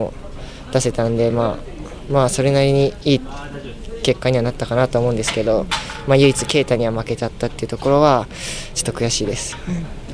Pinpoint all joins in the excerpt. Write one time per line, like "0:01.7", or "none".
none